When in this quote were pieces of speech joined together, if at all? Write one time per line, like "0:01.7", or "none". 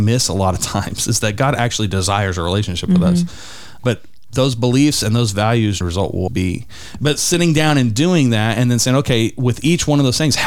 0:03.8
0:05.8
0:06.3